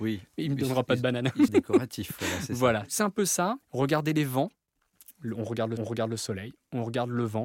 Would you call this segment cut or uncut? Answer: cut